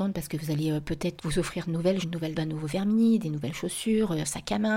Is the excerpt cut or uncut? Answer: cut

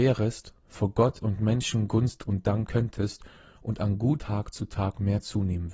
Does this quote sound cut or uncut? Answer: cut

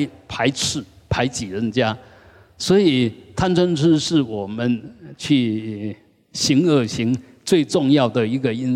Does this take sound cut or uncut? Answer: uncut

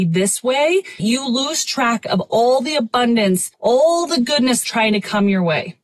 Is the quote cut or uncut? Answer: cut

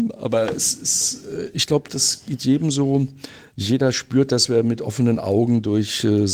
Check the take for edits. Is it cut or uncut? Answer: uncut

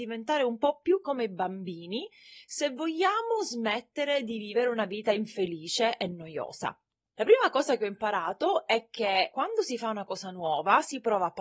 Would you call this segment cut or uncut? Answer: uncut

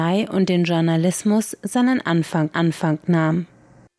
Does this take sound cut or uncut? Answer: cut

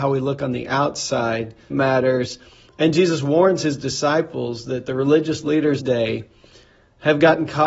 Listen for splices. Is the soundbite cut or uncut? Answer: cut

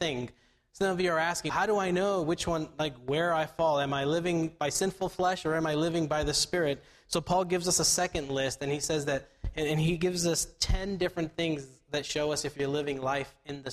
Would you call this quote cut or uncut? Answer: cut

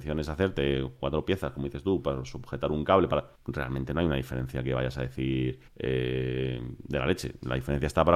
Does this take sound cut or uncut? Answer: cut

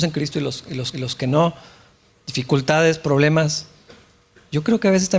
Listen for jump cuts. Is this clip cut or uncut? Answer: cut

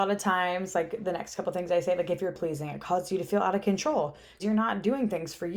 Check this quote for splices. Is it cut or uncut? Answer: cut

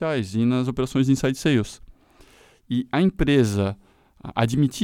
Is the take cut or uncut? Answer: uncut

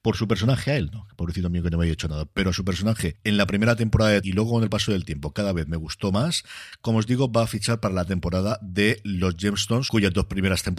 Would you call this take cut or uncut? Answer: cut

